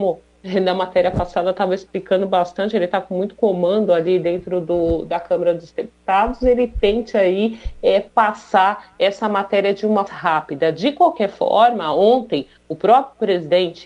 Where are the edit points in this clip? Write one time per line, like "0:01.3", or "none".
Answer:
0:10.1